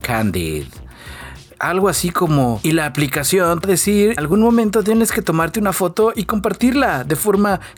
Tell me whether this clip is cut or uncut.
cut